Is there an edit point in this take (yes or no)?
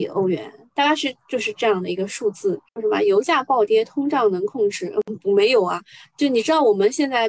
yes